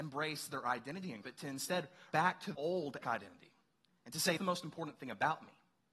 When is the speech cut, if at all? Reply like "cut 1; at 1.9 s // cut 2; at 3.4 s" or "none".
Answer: cut 1; at 1.2 s // cut 2; at 2.1 s // cut 3; at 2.5 s // cut 4; at 3.0 s // cut 5; at 4.4 s